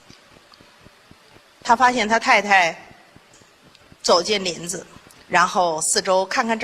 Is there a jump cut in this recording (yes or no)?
yes